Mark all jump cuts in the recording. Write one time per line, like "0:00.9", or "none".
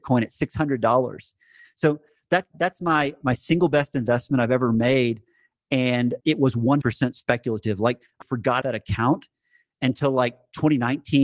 0:02.5
0:03.2
0:06.2
0:06.8
0:08.2
0:08.6